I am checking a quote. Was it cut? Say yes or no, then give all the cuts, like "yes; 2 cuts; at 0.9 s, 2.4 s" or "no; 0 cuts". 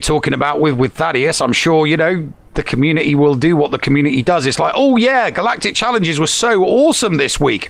no; 0 cuts